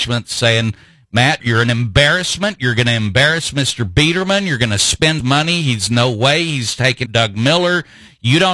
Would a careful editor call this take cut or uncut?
cut